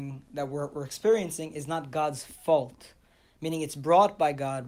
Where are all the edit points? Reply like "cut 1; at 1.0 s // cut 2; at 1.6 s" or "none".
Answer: none

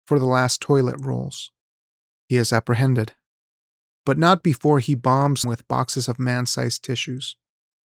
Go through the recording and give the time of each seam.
cut 1; at 5.4 s

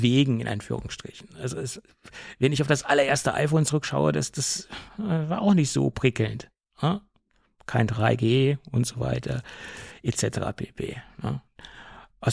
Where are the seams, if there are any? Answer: cut 1; at 4.9 s // cut 2; at 7.3 s

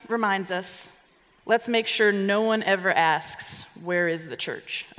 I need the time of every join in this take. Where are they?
cut 1; at 1.1 s

